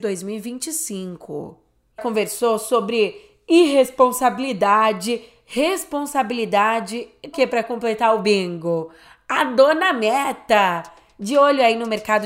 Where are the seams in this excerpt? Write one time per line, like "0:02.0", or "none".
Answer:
0:02.0
0:07.3